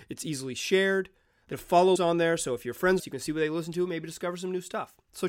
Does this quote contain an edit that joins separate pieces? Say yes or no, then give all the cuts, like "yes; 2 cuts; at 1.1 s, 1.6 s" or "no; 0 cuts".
yes; 3 cuts; at 1.5 s, 2.0 s, 3.0 s